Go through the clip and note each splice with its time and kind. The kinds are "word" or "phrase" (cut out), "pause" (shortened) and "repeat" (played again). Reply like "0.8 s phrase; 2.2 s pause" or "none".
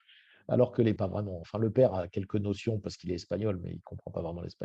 1.0 s phrase

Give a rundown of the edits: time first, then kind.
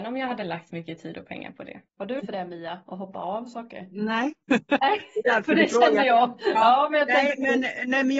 1.9 s pause; 2.2 s word; 4.4 s pause

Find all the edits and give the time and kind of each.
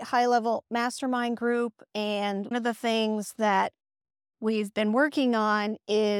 2.5 s word

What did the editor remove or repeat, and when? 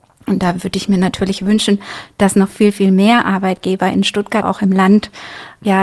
4.4 s word

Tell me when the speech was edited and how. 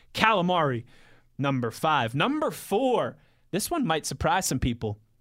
none

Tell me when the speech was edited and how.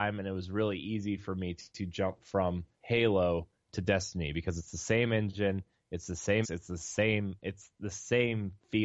2.7 s pause; 6.4 s word

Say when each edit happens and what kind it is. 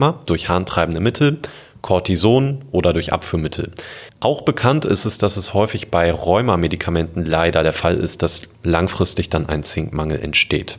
4.1 s pause

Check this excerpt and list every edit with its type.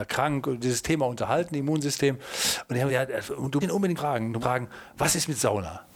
2.9 s word; 3.6 s word; 4.0 s word; 4.4 s word

